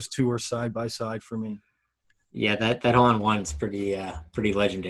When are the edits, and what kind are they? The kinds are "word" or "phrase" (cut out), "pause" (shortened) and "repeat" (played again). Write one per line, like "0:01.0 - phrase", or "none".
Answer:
none